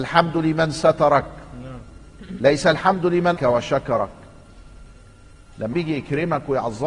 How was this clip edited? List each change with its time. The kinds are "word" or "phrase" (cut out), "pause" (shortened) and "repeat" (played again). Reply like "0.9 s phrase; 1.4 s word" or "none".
3.4 s word; 5.7 s word

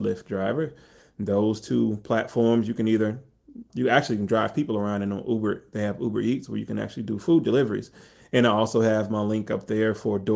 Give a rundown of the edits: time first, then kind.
3.7 s word

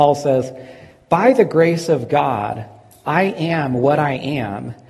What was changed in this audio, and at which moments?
none

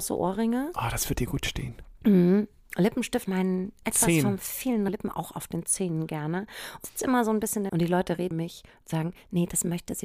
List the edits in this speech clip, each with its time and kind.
3.3 s word; 3.8 s word; 4.9 s word; 6.8 s word; 7.7 s word; 8.3 s word

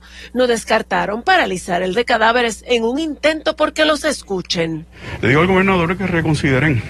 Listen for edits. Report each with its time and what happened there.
1.9 s word

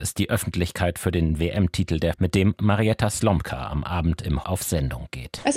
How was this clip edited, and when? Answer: 2.1 s word; 4.4 s word

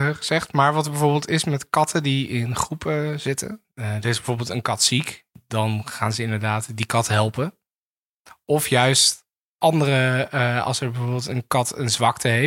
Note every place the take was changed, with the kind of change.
none

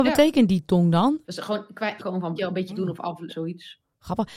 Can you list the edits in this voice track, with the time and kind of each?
1.2 s pause; 2.0 s word; 2.4 s phrase; 2.7 s word; 3.3 s word

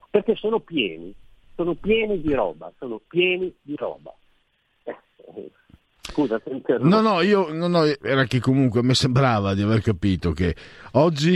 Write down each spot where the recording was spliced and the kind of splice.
none

